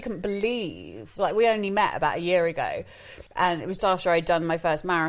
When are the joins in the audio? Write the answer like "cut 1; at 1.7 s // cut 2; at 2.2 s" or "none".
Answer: cut 1; at 3.3 s // cut 2; at 3.8 s

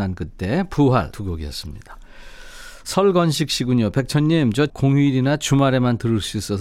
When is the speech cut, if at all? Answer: cut 1; at 1.1 s // cut 2; at 4.7 s

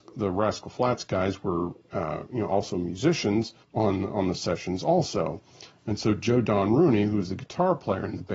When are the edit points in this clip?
cut 1; at 3.6 s

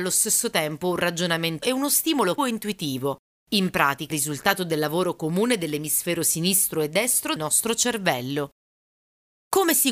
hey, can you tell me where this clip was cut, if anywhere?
cut 1; at 1.6 s // cut 2; at 2.4 s // cut 3; at 4.1 s // cut 4; at 7.4 s

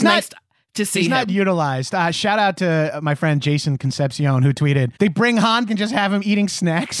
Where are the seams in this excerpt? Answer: cut 1; at 5.0 s // cut 2; at 5.7 s

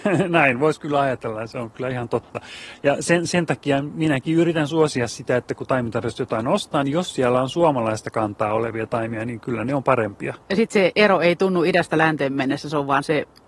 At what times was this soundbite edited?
cut 1; at 10.4 s

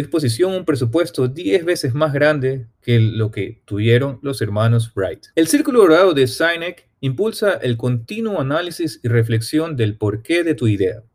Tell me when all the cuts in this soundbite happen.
cut 1; at 2.7 s // cut 2; at 3.6 s // cut 3; at 5.3 s

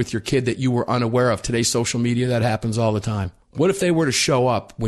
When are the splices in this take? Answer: cut 1; at 3.4 s

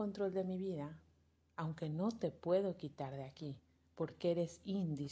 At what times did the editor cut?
none

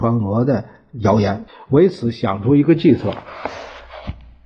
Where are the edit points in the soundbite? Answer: cut 1; at 1.5 s

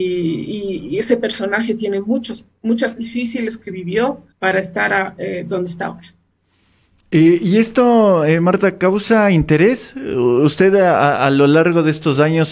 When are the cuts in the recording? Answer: cut 1; at 3.0 s // cut 2; at 4.3 s

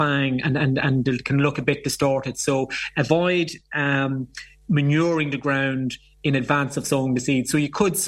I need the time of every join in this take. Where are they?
none

